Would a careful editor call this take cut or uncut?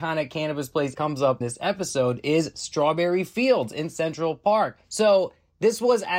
cut